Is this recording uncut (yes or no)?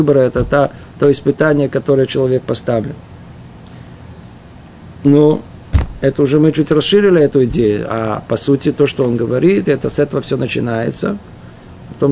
yes